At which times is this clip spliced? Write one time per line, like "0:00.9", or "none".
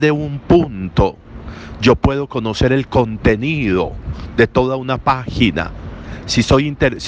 none